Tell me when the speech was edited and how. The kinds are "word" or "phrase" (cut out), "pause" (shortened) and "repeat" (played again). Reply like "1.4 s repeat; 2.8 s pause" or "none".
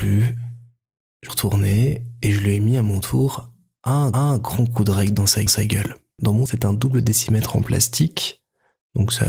1.3 s phrase; 4.1 s repeat; 5.5 s repeat; 6.5 s word